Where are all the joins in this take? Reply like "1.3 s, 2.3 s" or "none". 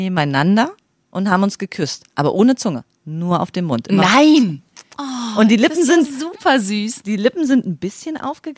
4.9 s